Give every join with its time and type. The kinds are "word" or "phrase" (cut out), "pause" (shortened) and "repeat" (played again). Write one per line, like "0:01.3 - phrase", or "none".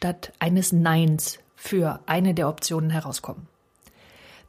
none